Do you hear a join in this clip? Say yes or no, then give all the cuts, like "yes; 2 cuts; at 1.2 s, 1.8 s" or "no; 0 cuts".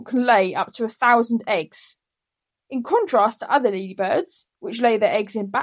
no; 0 cuts